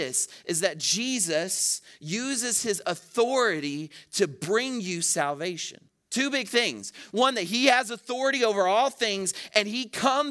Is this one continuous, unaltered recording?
no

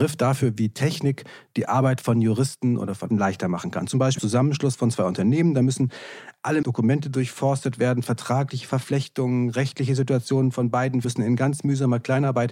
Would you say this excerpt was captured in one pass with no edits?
no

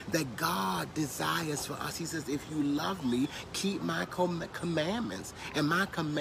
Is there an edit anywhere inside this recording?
no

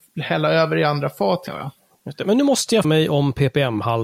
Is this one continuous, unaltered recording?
no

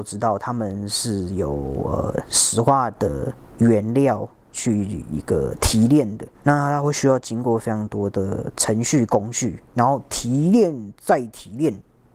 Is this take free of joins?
no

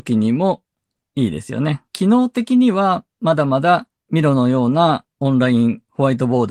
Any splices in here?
yes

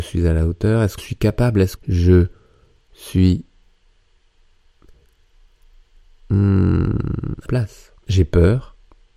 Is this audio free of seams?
no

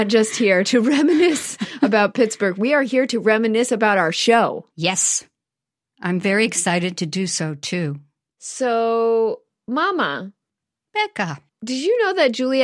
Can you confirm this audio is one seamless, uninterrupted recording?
yes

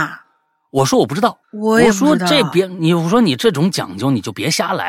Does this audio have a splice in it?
yes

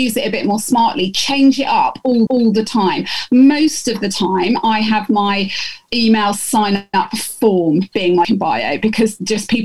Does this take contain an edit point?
yes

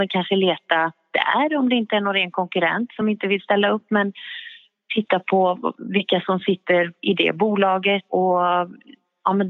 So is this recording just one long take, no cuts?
yes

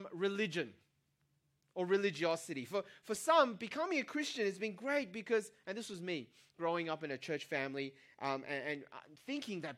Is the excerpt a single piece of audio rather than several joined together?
yes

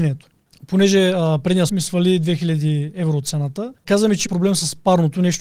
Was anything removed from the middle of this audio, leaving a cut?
yes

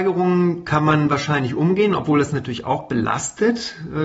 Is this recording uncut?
yes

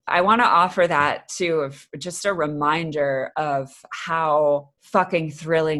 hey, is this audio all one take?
yes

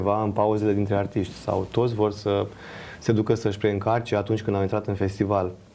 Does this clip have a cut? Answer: no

